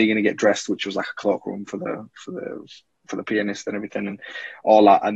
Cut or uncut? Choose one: uncut